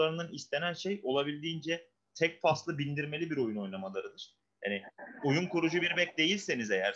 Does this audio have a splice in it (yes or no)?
no